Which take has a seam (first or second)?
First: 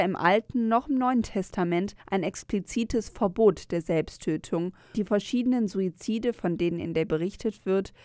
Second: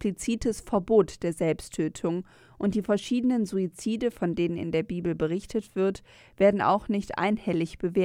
first